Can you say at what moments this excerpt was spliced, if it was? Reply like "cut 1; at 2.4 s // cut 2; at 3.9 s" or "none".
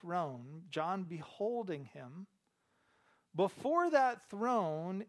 none